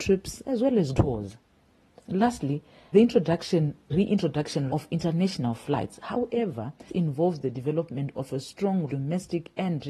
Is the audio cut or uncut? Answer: cut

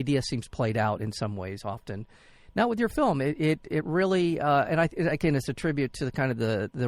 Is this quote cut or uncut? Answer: uncut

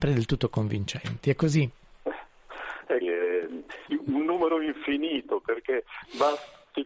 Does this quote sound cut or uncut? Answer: cut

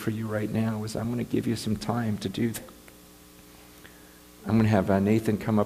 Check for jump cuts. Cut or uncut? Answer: uncut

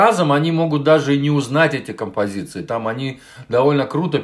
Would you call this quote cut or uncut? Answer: uncut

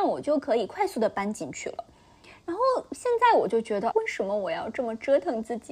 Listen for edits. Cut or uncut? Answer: cut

